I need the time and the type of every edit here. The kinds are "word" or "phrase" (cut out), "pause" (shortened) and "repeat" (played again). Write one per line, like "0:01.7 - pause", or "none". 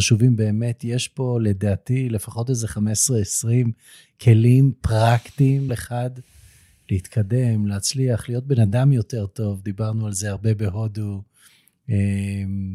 0:05.7 - word